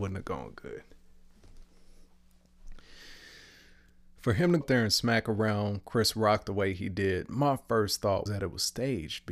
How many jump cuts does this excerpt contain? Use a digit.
2